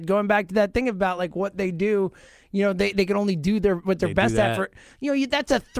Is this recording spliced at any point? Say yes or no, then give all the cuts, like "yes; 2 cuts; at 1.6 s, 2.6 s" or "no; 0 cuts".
no; 0 cuts